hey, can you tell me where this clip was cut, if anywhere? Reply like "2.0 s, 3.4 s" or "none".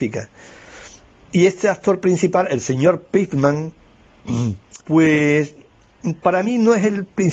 4.8 s